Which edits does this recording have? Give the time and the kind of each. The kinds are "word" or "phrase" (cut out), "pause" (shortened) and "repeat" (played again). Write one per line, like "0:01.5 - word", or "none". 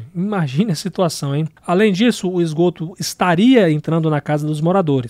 0:01.6 - pause